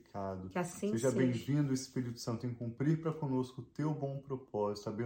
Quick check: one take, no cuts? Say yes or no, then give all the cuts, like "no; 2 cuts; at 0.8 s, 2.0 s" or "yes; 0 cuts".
yes; 0 cuts